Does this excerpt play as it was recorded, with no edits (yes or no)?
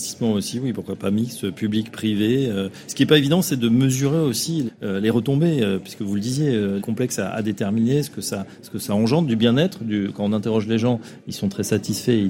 no